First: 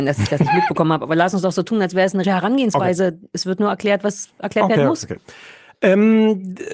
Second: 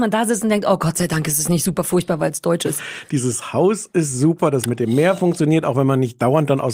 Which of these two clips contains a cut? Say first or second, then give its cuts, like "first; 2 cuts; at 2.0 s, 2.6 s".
first; 1 cut; at 2.2 s